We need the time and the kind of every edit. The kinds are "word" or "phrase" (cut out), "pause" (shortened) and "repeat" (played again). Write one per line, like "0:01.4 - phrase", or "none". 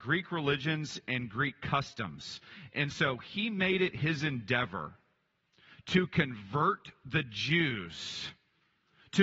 none